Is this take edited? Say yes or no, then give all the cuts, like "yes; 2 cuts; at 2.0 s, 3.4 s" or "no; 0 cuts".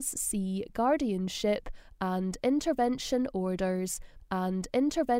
yes; 1 cut; at 4.2 s